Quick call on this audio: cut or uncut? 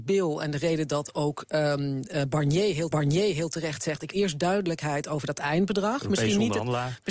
cut